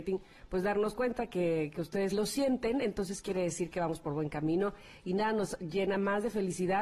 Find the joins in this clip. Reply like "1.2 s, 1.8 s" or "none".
2.1 s